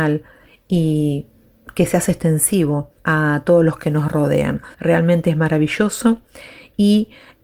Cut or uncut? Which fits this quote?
cut